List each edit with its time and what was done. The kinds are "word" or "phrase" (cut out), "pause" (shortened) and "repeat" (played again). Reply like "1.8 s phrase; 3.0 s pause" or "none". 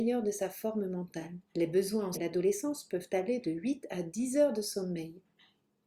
1.5 s pause; 2.1 s word